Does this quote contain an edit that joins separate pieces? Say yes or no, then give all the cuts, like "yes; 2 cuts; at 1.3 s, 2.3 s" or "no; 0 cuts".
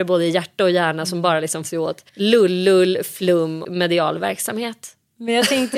yes; 3 cuts; at 1.6 s, 2.1 s, 3.6 s